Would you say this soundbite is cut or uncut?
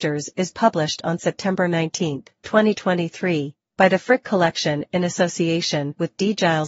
uncut